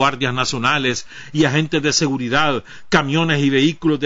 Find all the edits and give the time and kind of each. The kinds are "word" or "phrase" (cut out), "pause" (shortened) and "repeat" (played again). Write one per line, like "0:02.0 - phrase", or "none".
none